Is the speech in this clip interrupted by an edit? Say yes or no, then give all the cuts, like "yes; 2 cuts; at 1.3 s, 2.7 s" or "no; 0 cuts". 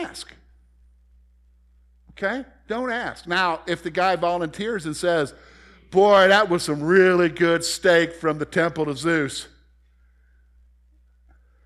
no; 0 cuts